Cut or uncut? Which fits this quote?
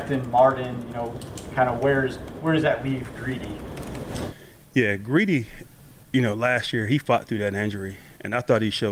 uncut